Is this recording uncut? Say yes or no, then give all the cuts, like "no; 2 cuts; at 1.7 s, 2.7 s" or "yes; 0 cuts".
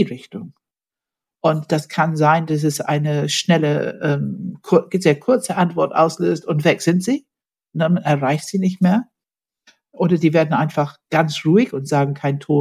yes; 0 cuts